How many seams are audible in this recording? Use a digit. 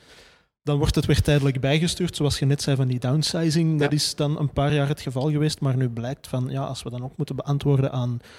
0